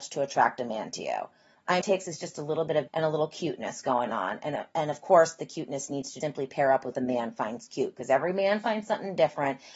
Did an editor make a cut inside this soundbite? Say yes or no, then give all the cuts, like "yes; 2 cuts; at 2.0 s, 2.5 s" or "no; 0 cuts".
yes; 4 cuts; at 1.8 s, 2.9 s, 6.2 s, 6.9 s